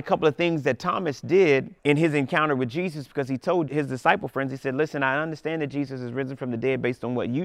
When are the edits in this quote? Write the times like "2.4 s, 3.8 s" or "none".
1.8 s, 3.7 s